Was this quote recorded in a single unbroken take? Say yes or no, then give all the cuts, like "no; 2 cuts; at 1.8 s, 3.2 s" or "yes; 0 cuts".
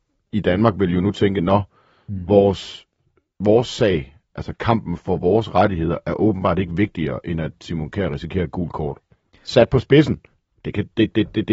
yes; 0 cuts